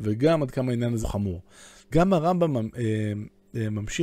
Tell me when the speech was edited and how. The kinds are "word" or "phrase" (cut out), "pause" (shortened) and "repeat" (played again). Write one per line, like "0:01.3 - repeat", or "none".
0:01.0 - word
0:01.9 - word